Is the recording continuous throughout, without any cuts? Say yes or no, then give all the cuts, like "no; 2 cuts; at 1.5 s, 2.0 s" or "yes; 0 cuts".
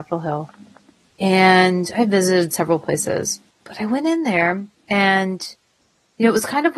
no; 2 cuts; at 3.5 s, 4.8 s